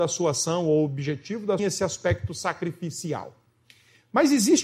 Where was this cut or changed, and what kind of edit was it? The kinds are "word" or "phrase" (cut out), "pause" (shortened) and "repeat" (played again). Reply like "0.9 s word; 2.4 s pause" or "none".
1.6 s phrase